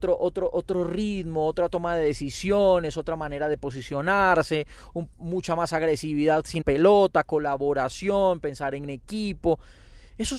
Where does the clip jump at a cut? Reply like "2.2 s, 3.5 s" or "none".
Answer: 6.6 s

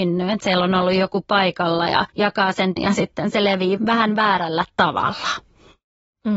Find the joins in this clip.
2.1 s, 2.8 s, 3.8 s

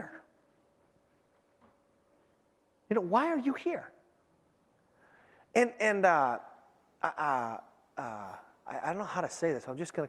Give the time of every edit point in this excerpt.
none

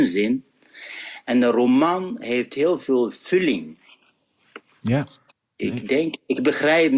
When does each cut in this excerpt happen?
5.3 s

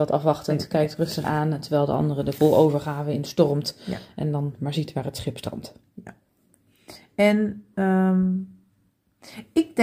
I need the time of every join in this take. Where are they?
1.2 s

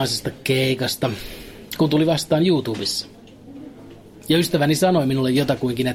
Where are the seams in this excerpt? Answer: none

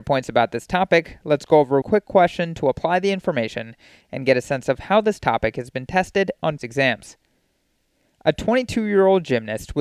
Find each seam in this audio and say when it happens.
1.8 s, 6.6 s

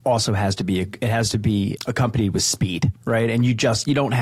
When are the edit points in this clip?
1.8 s

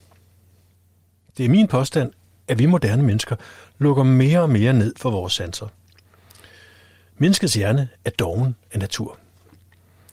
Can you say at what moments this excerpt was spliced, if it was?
none

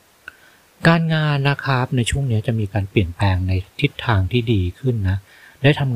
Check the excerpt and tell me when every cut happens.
3.7 s

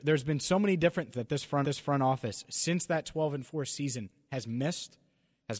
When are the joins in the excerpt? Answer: 1.1 s, 1.6 s

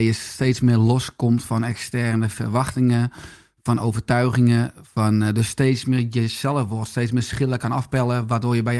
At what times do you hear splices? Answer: none

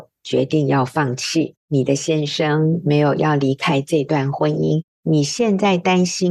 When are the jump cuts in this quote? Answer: 1.6 s

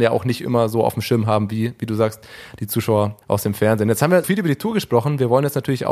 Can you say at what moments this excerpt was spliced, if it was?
3.2 s, 4.2 s

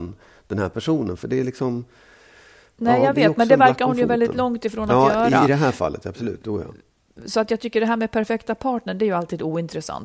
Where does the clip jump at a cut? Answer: none

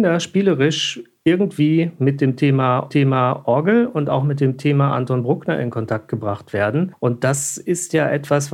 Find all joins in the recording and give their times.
2.9 s

